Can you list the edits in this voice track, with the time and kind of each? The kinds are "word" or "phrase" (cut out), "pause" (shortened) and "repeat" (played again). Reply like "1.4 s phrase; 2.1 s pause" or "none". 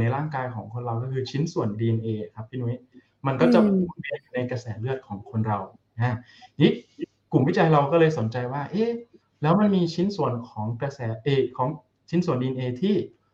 none